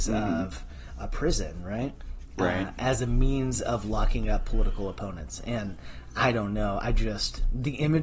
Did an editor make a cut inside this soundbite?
no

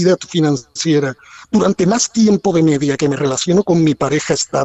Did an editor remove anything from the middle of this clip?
no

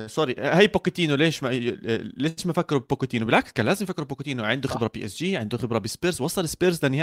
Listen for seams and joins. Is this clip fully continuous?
yes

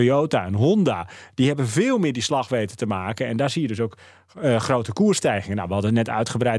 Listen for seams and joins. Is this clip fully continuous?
yes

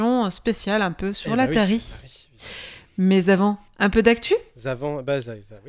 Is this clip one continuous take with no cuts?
yes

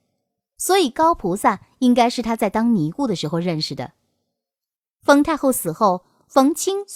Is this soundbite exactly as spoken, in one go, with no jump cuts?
yes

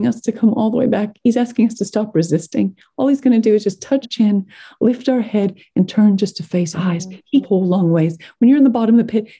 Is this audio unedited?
no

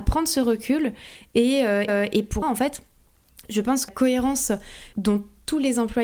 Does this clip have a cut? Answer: yes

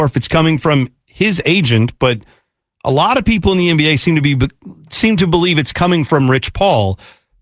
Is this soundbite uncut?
yes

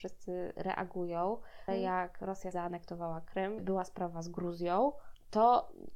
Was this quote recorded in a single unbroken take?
no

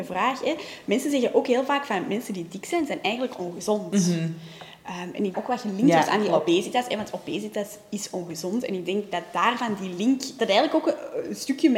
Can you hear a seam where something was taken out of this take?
yes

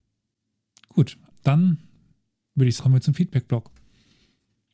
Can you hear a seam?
yes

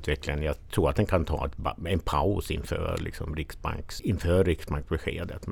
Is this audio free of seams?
yes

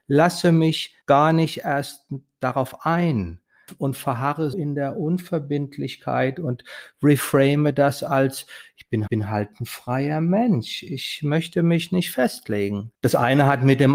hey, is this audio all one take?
no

